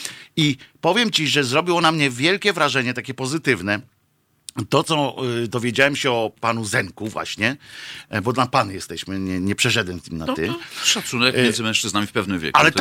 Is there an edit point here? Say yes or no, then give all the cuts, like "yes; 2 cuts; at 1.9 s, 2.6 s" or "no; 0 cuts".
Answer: no; 0 cuts